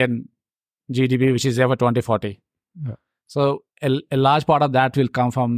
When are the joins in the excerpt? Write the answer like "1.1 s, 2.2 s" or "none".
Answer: none